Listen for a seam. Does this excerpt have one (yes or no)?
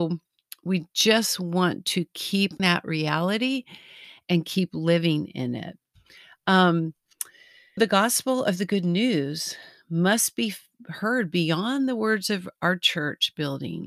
yes